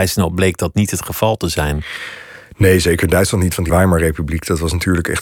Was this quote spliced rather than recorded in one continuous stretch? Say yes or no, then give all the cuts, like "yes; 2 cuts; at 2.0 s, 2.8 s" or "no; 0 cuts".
yes; 1 cut; at 3.7 s